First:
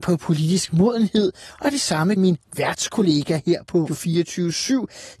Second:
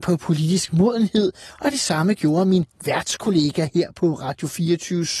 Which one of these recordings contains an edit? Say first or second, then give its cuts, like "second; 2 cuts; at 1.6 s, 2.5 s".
first; 2 cuts; at 2.2 s, 3.9 s